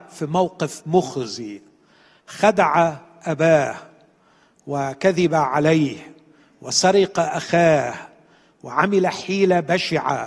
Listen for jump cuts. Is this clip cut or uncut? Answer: uncut